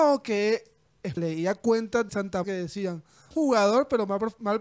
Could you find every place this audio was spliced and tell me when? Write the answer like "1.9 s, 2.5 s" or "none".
1.2 s, 2.1 s, 2.4 s, 3.3 s